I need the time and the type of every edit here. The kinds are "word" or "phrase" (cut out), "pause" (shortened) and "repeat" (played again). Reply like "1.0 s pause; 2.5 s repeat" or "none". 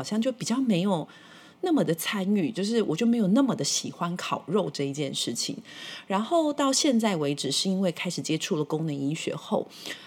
none